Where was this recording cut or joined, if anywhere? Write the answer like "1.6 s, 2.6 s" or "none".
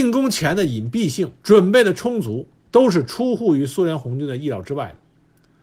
1.4 s, 2.6 s

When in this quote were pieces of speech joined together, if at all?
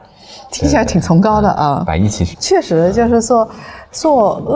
2.3 s

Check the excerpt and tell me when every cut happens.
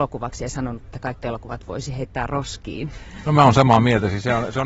1.2 s

